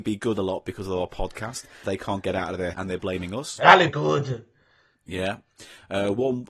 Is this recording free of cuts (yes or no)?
no